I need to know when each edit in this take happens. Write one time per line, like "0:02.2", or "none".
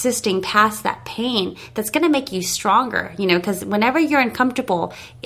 none